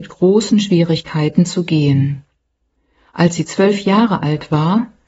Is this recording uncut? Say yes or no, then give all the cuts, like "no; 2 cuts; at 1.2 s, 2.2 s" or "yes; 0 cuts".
yes; 0 cuts